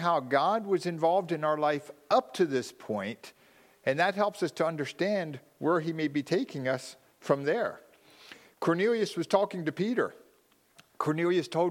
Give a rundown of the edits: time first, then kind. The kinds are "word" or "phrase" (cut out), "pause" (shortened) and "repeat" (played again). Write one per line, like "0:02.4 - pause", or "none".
none